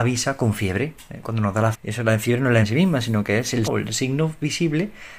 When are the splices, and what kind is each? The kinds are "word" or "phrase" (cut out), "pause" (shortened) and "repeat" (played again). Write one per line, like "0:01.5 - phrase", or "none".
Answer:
0:01.7 - word
0:02.6 - word
0:03.7 - word